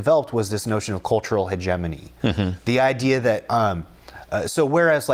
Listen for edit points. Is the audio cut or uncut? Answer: uncut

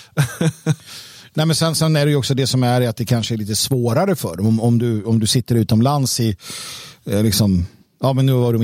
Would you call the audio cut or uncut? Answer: uncut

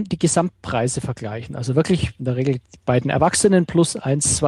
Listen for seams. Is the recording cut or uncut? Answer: uncut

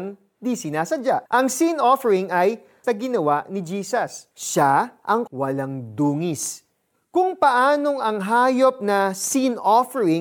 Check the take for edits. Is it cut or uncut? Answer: cut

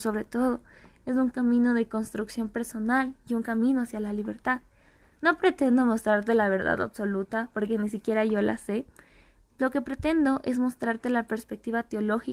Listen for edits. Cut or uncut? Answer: uncut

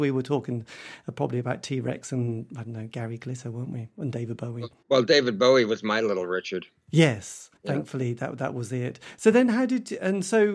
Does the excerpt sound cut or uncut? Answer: cut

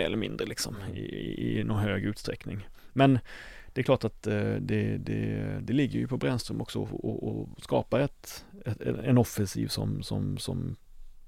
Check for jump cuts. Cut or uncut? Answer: uncut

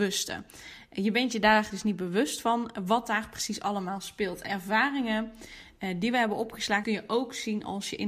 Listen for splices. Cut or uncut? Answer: cut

